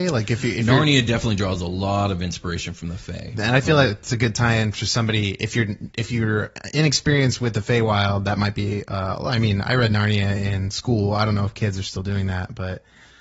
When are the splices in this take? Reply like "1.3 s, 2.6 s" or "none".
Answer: none